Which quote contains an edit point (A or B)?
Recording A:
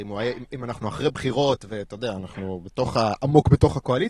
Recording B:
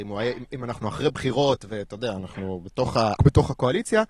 B